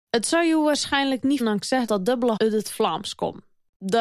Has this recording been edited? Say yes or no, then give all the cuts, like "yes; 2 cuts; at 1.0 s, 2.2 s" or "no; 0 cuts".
yes; 3 cuts; at 1.4 s, 1.9 s, 2.4 s